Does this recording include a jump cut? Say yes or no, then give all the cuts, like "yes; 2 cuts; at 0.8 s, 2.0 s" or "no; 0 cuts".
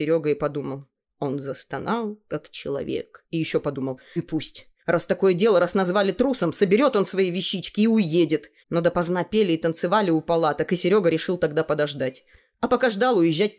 yes; 3 cuts; at 4.2 s, 4.8 s, 8.6 s